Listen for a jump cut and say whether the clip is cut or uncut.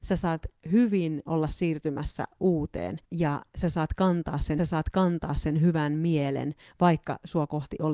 cut